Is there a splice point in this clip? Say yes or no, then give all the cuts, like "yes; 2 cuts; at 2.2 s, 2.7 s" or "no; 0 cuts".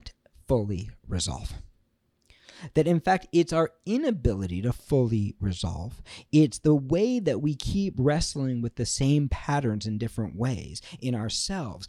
no; 0 cuts